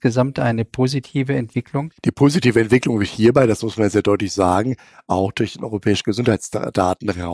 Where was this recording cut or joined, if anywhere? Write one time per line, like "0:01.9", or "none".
0:02.0